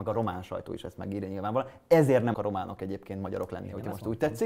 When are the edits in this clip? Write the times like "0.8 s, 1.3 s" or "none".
2.3 s